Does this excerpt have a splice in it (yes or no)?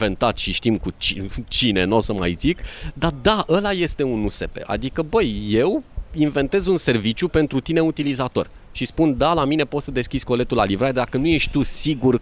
no